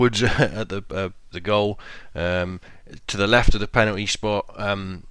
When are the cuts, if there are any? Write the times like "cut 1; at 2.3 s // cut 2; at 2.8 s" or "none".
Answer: cut 1; at 1.3 s